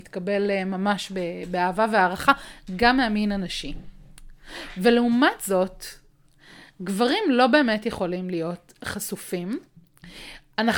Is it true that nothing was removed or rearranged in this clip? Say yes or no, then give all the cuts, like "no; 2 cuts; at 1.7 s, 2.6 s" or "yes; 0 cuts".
yes; 0 cuts